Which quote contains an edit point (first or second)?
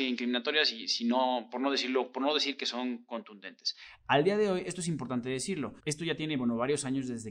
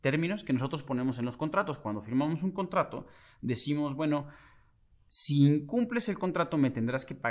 first